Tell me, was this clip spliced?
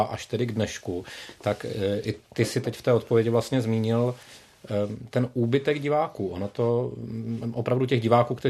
no; 0 cuts

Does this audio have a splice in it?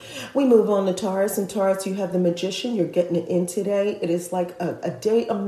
no; 0 cuts

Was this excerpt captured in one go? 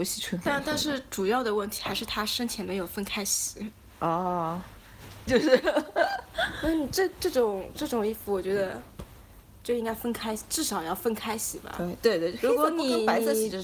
no; 1 cut; at 5.3 s

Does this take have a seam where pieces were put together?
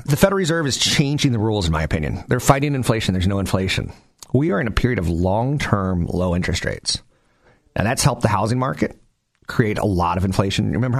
no; 0 cuts

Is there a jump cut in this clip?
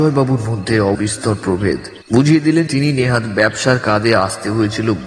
yes; 3 cuts; at 0.9 s, 2.0 s, 2.7 s

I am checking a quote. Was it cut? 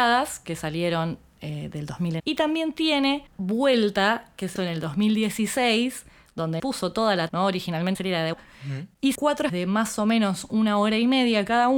yes; 9 cuts; at 2.2 s, 3.3 s, 4.6 s, 6.6 s, 7.3 s, 7.9 s, 8.3 s, 9.1 s, 9.5 s

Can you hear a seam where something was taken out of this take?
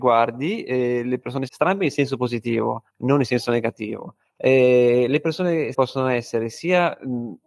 yes; 4 cuts; at 1.5 s, 2.9 s, 4.3 s, 5.7 s

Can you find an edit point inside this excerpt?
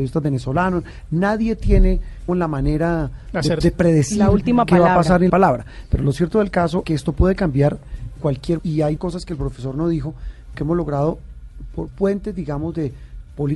yes; 9 cuts; at 2.3 s, 3.6 s, 5.3 s, 6.8 s, 8.2 s, 8.6 s, 9.0 s, 10.5 s, 11.9 s

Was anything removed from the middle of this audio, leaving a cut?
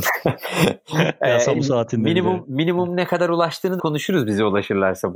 yes; 2 cuts; at 1.5 s, 3.8 s

